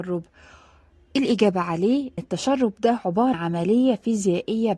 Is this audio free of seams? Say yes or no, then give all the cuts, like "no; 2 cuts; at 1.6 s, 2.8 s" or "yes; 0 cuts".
no; 2 cuts; at 2.2 s, 3.3 s